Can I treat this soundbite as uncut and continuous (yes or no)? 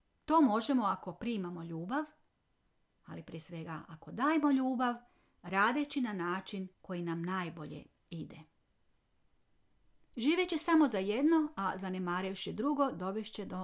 no